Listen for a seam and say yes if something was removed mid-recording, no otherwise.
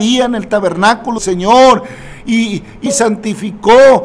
yes